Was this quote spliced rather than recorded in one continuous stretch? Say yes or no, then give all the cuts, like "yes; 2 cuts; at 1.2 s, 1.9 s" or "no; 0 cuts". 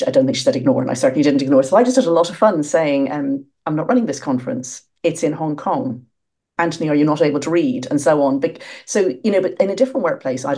no; 0 cuts